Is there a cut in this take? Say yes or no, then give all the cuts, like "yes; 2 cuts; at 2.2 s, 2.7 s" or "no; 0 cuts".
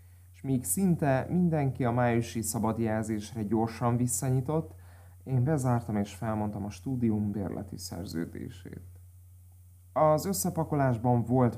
no; 0 cuts